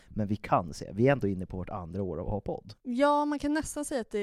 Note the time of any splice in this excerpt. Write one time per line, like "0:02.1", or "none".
none